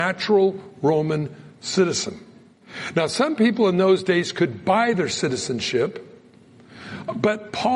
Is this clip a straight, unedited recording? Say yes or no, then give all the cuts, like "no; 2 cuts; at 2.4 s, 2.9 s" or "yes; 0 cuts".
yes; 0 cuts